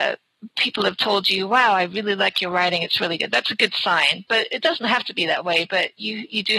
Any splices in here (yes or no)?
no